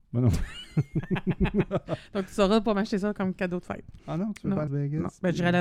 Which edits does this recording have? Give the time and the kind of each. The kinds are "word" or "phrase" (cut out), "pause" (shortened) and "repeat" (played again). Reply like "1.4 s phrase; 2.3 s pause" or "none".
4.7 s phrase